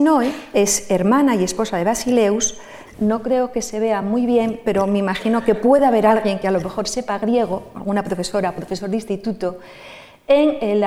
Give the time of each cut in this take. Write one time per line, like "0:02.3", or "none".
none